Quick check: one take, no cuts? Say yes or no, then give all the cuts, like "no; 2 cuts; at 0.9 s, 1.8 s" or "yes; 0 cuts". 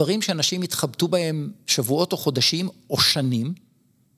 yes; 0 cuts